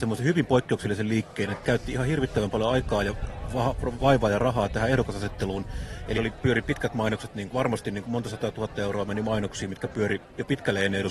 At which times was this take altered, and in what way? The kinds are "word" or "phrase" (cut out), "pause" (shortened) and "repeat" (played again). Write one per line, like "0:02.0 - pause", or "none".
0:01.6 - word
0:06.2 - word
0:07.5 - word